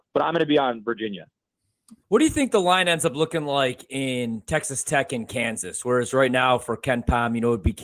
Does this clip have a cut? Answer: yes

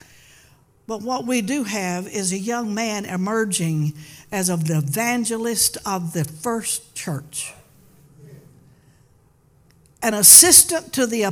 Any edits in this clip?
no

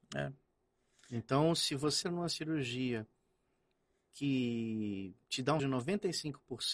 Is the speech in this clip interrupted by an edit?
yes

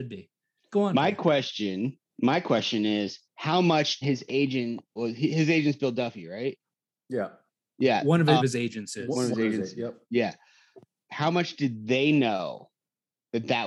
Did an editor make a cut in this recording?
yes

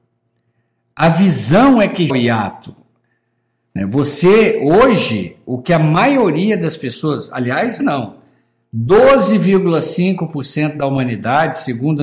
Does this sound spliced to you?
yes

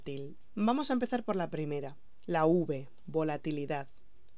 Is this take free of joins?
yes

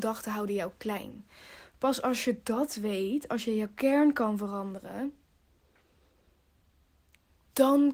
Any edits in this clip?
no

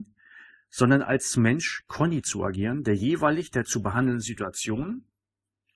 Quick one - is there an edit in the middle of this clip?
no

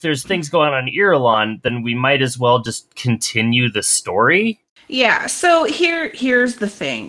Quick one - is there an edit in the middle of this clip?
no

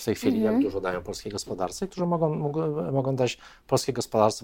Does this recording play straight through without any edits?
yes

